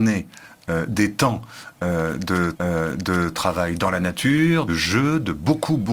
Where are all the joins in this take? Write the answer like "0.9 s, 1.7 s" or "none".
2.5 s, 4.7 s